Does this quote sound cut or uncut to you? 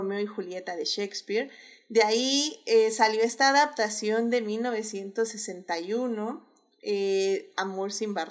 uncut